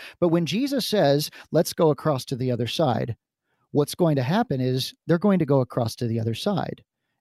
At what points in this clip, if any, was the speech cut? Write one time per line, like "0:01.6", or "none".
none